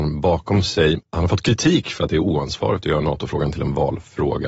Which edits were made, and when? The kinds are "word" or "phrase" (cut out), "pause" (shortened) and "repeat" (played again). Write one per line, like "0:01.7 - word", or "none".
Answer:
0:01.0 - pause